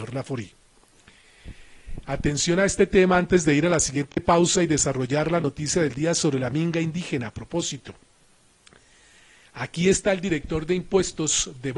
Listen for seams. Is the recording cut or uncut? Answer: uncut